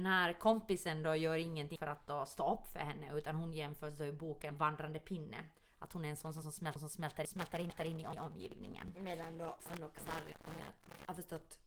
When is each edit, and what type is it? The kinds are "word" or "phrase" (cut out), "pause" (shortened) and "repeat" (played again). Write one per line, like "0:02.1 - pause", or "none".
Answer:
0:01.8 - word
0:04.5 - word
0:06.4 - word